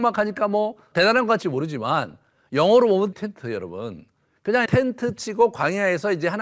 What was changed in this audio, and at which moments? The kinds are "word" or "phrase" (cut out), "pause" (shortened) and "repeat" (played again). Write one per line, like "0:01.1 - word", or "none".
0:00.9 - word
0:01.4 - word
0:03.1 - word
0:04.7 - word